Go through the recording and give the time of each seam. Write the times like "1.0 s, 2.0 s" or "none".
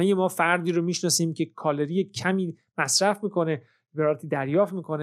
none